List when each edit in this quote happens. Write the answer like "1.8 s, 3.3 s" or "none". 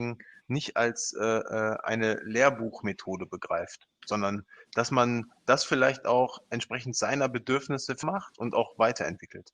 8.0 s